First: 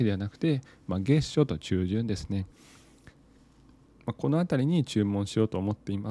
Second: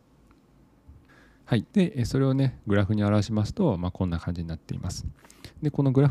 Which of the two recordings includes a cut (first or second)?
second